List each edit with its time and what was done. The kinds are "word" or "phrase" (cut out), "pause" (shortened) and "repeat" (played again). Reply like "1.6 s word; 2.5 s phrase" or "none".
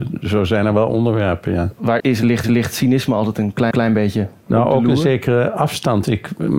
2.0 s word; 2.4 s repeat; 3.7 s repeat